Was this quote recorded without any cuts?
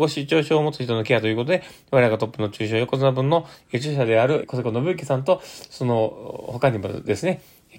no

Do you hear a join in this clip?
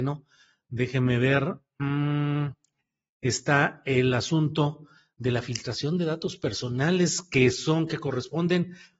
no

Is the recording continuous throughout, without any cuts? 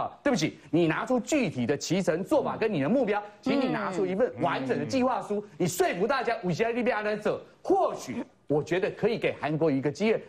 yes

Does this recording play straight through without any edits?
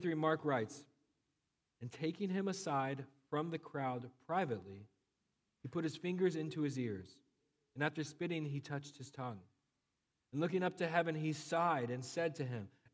yes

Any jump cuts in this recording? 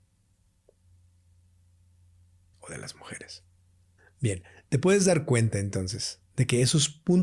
yes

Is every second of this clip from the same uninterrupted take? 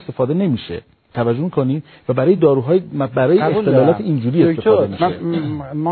yes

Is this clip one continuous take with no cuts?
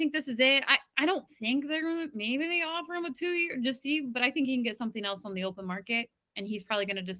yes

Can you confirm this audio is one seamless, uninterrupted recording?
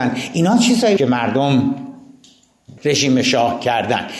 no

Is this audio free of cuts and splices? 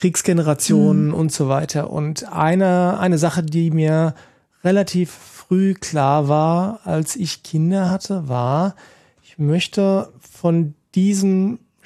yes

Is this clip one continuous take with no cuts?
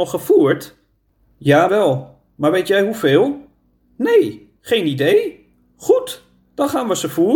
no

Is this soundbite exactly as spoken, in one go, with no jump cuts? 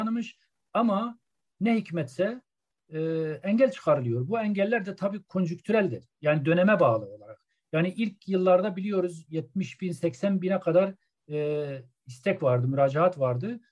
yes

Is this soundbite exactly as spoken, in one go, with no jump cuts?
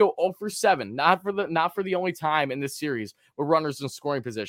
yes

